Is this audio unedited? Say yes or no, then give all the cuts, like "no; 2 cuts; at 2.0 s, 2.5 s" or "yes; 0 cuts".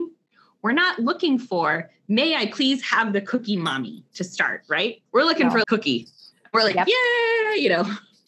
no; 2 cuts; at 5.1 s, 5.6 s